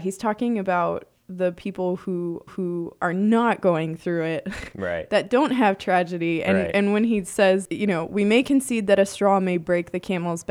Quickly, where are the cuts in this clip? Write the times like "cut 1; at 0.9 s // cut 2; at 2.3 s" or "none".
cut 1; at 2.5 s